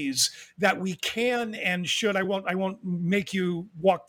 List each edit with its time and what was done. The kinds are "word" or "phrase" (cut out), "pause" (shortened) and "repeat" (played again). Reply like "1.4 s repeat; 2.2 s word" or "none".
none